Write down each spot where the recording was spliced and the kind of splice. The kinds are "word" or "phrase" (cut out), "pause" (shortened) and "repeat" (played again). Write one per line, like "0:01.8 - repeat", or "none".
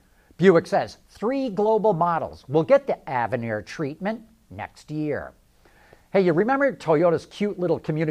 none